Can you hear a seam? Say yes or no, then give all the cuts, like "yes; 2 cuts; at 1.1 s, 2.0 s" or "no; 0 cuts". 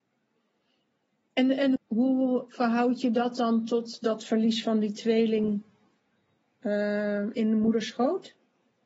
yes; 1 cut; at 1.8 s